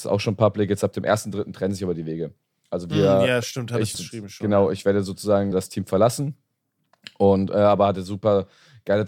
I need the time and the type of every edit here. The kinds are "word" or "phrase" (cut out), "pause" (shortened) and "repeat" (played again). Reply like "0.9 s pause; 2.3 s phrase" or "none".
3.9 s word; 5.5 s word